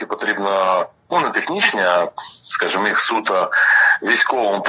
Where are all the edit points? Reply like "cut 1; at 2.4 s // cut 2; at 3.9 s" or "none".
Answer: none